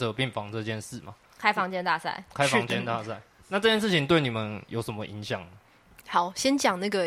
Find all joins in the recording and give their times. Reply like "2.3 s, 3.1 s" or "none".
1.3 s